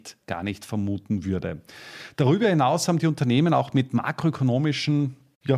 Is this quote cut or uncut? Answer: uncut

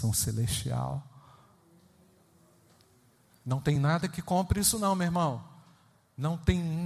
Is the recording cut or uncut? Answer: uncut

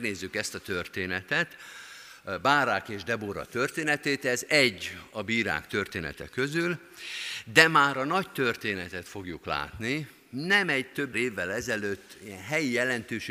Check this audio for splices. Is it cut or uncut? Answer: cut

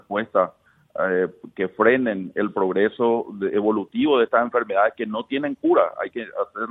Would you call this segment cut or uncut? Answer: uncut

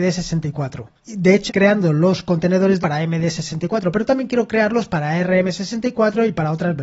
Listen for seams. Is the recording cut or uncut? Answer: cut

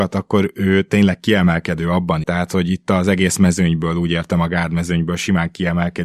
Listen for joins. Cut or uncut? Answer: cut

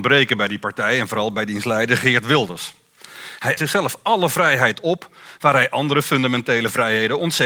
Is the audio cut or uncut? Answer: cut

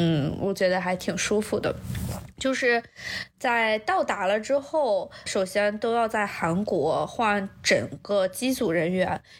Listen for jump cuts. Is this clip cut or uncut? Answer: cut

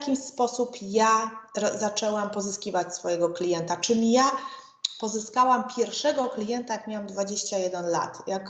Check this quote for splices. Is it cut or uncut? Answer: uncut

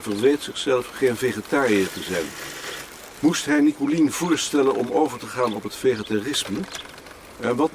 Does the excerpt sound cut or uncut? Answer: uncut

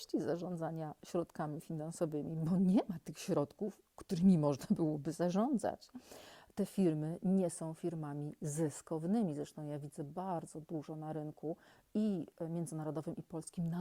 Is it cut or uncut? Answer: uncut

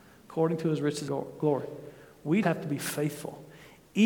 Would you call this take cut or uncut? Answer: cut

